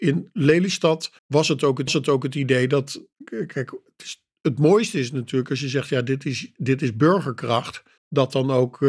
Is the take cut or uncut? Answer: cut